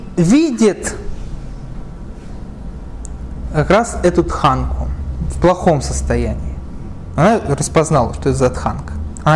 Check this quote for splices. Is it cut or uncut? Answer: uncut